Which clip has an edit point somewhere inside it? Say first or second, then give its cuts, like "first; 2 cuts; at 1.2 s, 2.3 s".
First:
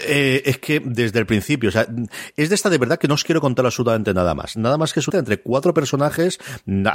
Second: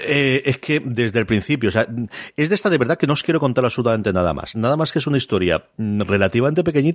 first; 1 cut; at 5.1 s